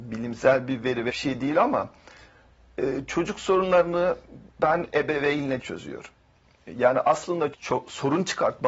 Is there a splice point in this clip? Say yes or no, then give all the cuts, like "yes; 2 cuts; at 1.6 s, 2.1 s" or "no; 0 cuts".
yes; 4 cuts; at 1.1 s, 4.5 s, 5.6 s, 7.5 s